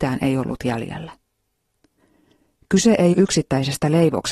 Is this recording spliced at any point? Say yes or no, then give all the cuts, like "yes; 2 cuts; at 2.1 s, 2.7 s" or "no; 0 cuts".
yes; 1 cut; at 3.1 s